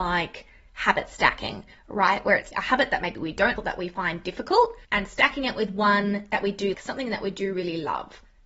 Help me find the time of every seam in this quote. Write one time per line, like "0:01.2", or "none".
0:02.5
0:03.6
0:04.8
0:06.7